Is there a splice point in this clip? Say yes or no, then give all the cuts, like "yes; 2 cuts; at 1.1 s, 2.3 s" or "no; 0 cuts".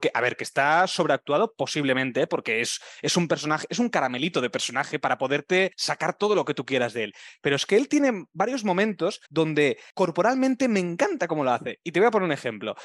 yes; 1 cut; at 9.2 s